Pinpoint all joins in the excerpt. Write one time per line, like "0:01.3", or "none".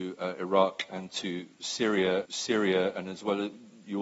0:02.2

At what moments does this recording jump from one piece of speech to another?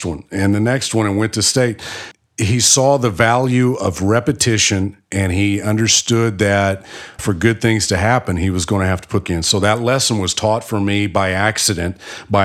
0:07.2
0:09.2

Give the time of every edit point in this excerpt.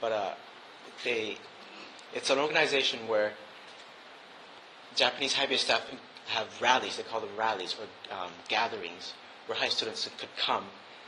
0:04.9
0:09.7

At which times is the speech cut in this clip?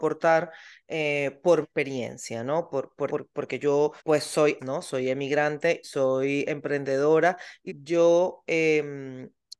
0:01.6
0:03.1
0:04.0
0:04.6
0:05.8
0:07.7

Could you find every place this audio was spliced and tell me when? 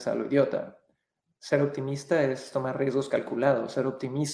0:01.2

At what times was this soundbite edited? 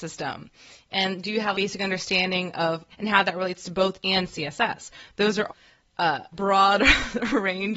0:01.5
0:02.9
0:04.0
0:05.5
0:06.3

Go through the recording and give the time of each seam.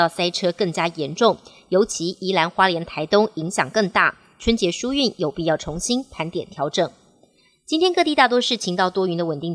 none

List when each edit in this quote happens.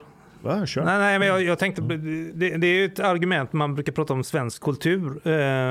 none

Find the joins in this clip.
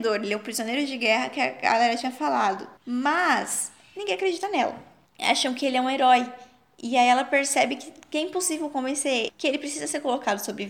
0:02.8

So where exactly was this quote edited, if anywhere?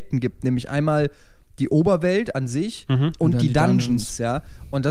none

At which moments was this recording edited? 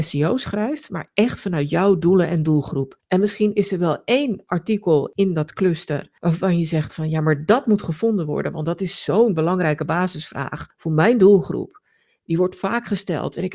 none

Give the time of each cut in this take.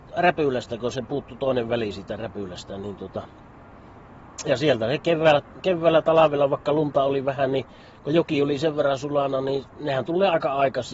none

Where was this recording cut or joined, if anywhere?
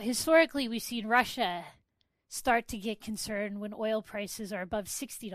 none

